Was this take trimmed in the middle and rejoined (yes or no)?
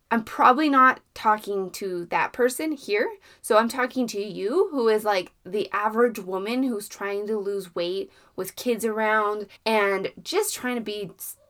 yes